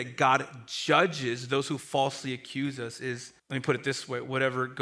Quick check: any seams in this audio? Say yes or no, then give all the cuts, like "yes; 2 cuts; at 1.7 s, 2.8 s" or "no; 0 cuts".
yes; 1 cut; at 3.4 s